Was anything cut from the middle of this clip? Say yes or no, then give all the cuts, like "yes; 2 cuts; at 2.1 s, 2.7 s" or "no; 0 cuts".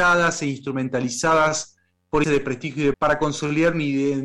yes; 2 cuts; at 2.2 s, 2.9 s